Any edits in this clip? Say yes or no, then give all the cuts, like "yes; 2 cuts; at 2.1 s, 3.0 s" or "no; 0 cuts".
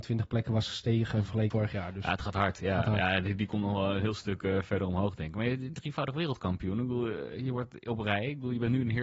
yes; 1 cut; at 1.5 s